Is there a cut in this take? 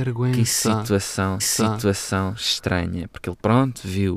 yes; 1 cut; at 1.4 s

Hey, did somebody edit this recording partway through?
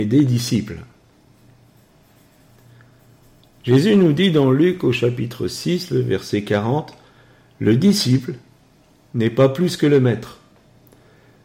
no; 0 cuts

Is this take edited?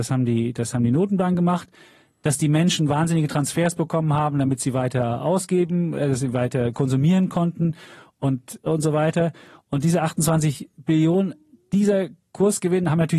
no; 0 cuts

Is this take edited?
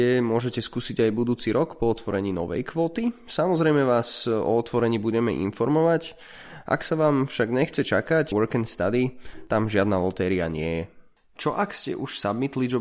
yes; 1 cut; at 8.3 s

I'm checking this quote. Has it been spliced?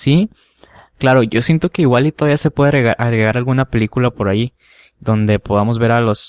no; 0 cuts

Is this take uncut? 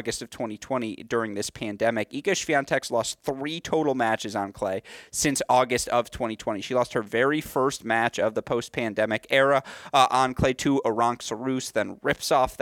yes; 0 cuts

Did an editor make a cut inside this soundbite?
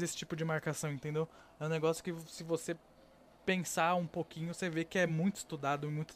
no; 0 cuts

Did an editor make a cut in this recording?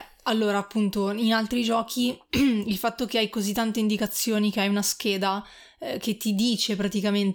no; 0 cuts

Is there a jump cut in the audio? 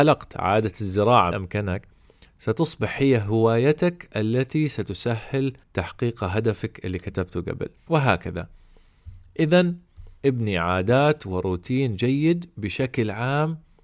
yes; 4 cuts; at 1.3 s, 5.6 s, 7.8 s, 10.2 s

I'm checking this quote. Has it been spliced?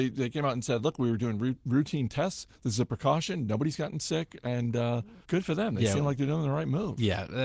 yes; 2 cuts; at 2.5 s, 5.2 s

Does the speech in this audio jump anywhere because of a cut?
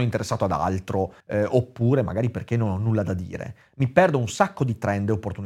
yes; 1 cut; at 1.2 s

